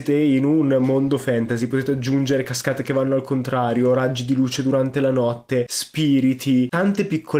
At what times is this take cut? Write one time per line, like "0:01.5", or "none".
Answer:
none